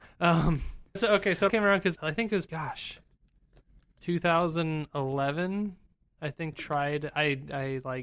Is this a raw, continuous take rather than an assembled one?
no; 5 cuts; at 1.0 s, 1.5 s, 2.0 s, 2.5 s, 6.5 s

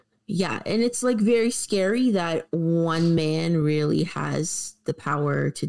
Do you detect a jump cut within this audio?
no; 0 cuts

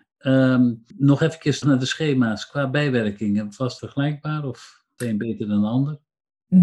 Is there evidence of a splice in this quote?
yes; 4 cuts; at 0.9 s, 1.6 s, 3.8 s, 5.0 s

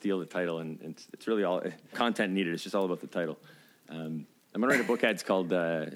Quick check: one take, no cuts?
no; 1 cut; at 1.9 s

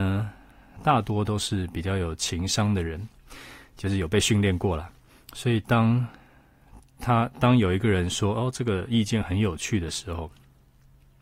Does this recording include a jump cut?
yes; 1 cut; at 5.1 s

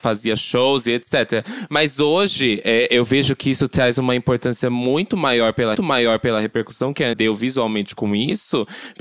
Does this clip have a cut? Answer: yes; 2 cuts; at 5.7 s, 7.1 s

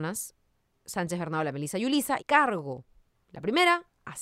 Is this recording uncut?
no; 1 cut; at 2.2 s

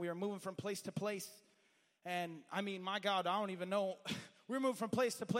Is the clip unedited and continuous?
yes; 0 cuts

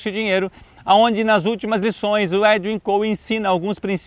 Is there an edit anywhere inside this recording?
no; 0 cuts

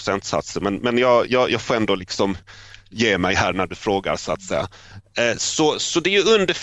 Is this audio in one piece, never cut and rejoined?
yes; 0 cuts

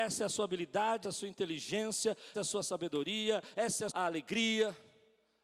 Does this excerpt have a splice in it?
yes; 3 cuts; at 1.0 s, 2.3 s, 3.9 s

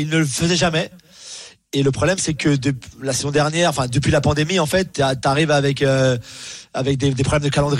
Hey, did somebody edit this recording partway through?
no; 0 cuts

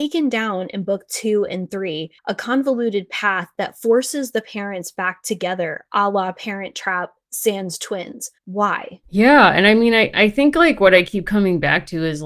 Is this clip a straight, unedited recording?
no; 2 cuts; at 2.2 s, 8.4 s

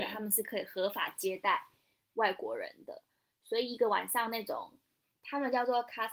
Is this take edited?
no; 0 cuts

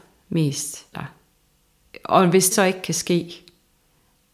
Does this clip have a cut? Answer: yes; 2 cuts; at 0.9 s, 2.5 s

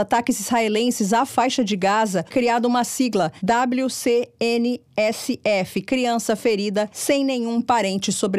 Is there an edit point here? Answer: yes; 1 cut; at 2.3 s

